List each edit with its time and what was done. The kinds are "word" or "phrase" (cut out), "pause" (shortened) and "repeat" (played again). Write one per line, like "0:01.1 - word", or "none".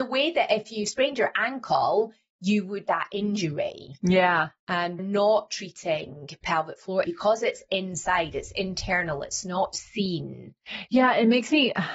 0:02.8 - word
0:05.0 - word
0:07.0 - word